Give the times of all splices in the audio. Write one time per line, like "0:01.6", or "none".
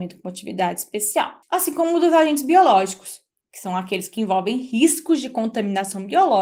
0:01.4
0:03.4